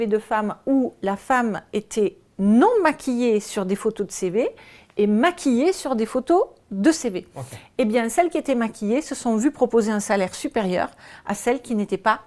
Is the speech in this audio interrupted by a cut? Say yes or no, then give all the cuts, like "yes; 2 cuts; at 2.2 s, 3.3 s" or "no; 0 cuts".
no; 0 cuts